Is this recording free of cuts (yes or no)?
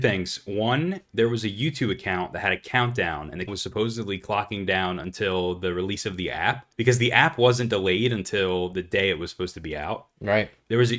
no